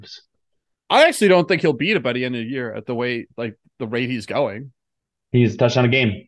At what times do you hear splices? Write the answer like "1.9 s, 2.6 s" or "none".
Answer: none